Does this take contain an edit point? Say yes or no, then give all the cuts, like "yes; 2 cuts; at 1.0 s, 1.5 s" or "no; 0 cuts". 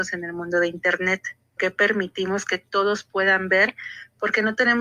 yes; 1 cut; at 1.6 s